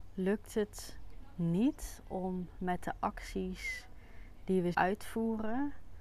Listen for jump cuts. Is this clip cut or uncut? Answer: cut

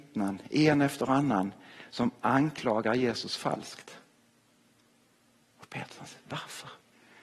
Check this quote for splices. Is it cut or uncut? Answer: uncut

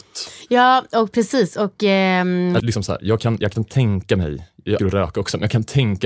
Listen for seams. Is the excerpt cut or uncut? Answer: cut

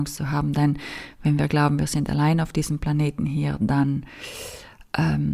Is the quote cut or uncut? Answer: uncut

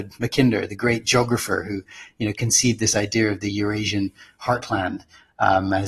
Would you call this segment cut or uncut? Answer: uncut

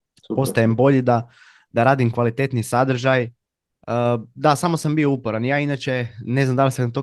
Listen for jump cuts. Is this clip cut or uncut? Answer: uncut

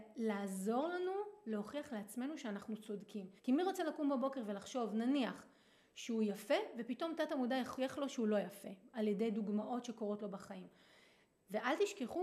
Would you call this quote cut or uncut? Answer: cut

